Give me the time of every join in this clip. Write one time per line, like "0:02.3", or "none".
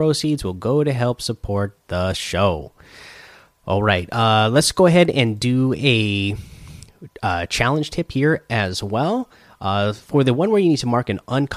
none